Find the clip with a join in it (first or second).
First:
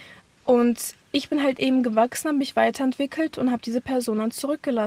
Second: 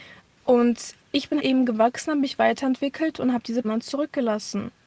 second